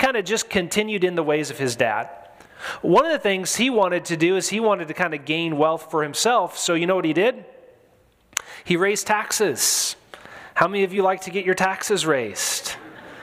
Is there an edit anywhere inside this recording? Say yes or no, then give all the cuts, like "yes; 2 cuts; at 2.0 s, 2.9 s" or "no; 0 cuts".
no; 0 cuts